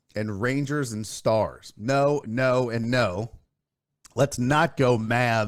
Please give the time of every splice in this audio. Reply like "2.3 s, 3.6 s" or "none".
none